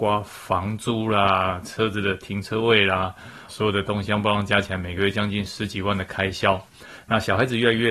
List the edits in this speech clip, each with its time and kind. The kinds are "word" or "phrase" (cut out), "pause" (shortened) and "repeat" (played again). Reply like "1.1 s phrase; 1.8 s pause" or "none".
3.5 s word

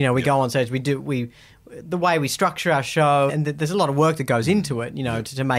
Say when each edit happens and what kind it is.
3.3 s word

